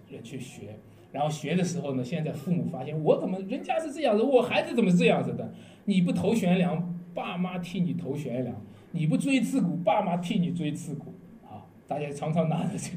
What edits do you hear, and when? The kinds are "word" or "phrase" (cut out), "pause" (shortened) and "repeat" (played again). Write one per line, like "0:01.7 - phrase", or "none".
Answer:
0:11.8 - pause